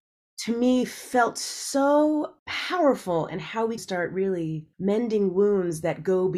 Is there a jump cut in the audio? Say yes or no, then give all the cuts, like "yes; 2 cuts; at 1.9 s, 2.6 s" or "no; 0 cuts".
yes; 3 cuts; at 2.4 s, 3.8 s, 4.7 s